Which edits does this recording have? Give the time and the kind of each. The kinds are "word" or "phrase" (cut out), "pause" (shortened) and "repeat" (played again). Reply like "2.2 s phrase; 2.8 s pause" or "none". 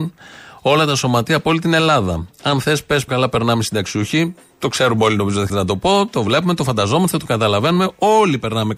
3.1 s word; 5.5 s word